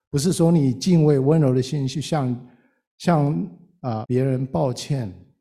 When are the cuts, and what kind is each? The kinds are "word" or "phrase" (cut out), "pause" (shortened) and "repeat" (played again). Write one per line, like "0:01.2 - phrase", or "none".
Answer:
0:04.0 - word